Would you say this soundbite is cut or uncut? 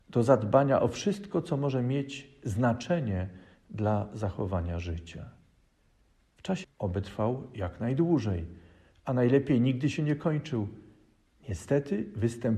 cut